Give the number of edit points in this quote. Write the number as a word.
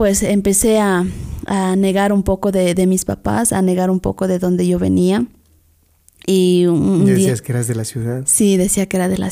zero